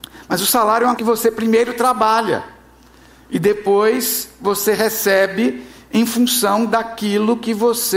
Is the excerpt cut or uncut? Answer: cut